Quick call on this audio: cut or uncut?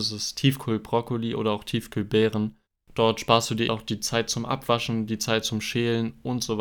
cut